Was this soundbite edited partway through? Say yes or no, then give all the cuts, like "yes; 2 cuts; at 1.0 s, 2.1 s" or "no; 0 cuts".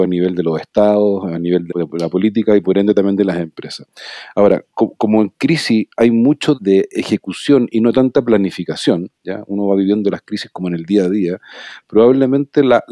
yes; 2 cuts; at 1.7 s, 6.5 s